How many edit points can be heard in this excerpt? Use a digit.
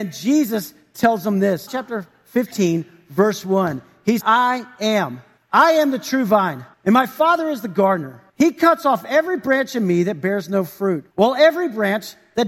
6